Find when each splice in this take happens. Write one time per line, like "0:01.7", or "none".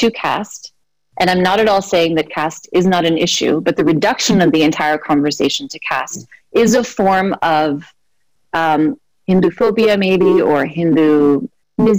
none